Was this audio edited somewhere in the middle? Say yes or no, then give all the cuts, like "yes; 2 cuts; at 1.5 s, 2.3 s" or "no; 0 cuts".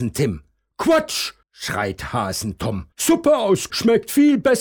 yes; 3 cuts; at 1.4 s, 2.9 s, 3.7 s